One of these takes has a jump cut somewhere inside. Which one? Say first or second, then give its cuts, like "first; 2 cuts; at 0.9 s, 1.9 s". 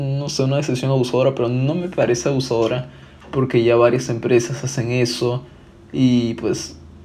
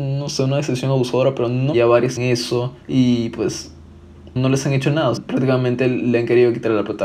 second; 5 cuts; at 1.7 s, 2.2 s, 2.8 s, 4.4 s, 5.2 s